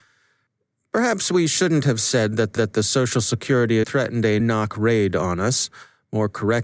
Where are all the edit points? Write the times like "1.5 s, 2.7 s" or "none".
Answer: 2.6 s, 3.8 s, 4.4 s